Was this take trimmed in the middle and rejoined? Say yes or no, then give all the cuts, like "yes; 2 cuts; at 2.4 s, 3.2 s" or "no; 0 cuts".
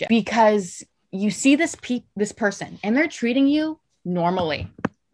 no; 0 cuts